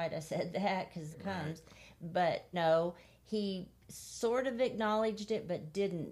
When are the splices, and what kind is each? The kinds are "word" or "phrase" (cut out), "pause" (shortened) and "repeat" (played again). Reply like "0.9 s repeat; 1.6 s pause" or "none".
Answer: 1.1 s phrase; 2.5 s word; 3.8 s pause